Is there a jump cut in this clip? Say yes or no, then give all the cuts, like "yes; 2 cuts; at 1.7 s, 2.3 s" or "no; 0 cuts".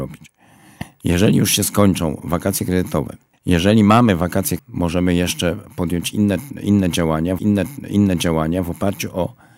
yes; 3 cuts; at 3.3 s, 4.6 s, 7.4 s